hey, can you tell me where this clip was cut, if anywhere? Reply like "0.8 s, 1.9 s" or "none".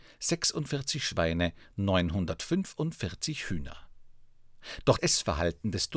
5.0 s